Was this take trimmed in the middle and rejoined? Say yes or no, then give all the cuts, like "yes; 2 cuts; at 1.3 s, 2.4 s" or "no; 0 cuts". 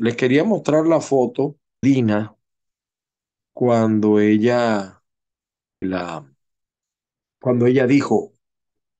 yes; 2 cuts; at 1.8 s, 5.8 s